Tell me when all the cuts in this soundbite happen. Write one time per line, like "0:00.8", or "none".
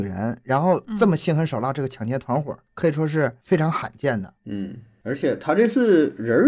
0:02.7
0:04.4